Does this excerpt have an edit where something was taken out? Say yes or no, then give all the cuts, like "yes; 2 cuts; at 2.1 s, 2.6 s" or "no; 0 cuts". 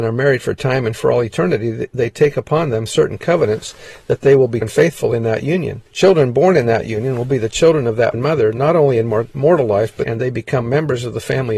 yes; 4 cuts; at 4.6 s, 5.9 s, 8.1 s, 10.0 s